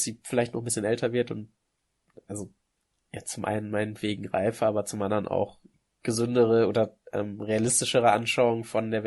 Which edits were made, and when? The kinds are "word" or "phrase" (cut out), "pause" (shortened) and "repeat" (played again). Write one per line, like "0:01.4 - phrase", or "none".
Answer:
0:02.6 - pause
0:05.7 - pause
0:07.0 - pause